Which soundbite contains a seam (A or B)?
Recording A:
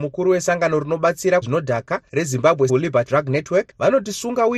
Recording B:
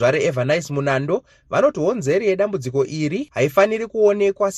A